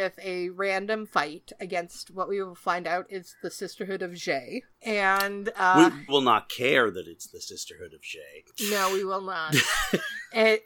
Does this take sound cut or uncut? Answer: cut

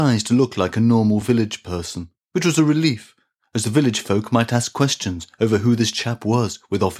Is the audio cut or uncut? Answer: uncut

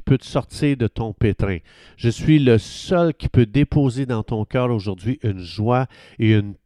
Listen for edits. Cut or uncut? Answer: uncut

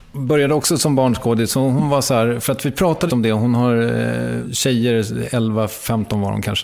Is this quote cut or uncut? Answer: cut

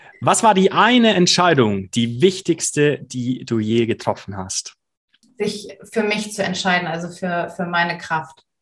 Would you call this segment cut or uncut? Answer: uncut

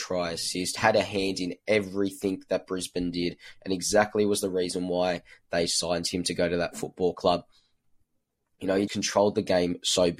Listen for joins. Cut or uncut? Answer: cut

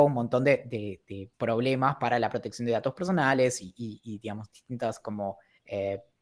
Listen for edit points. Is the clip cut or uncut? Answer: cut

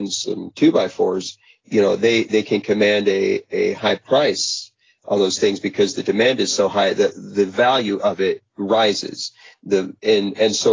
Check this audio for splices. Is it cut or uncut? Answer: uncut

